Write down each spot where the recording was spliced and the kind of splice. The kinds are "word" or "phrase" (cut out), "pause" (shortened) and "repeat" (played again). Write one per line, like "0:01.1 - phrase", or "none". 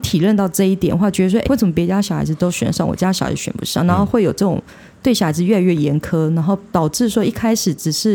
0:01.4 - word